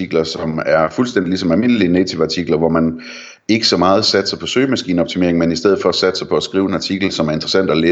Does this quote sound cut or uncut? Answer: uncut